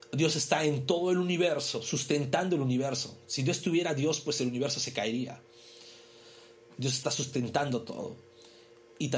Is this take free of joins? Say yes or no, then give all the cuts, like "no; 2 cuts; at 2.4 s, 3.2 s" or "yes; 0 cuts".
yes; 0 cuts